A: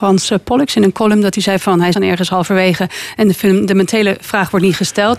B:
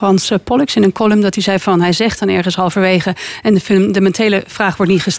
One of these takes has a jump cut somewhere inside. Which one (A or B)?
A